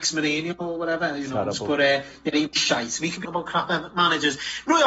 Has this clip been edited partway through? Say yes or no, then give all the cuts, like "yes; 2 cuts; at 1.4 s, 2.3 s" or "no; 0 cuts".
yes; 1 cut; at 3.2 s